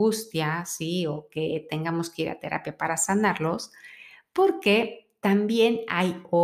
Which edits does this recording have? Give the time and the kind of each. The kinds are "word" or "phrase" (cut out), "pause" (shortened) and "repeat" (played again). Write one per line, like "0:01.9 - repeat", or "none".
none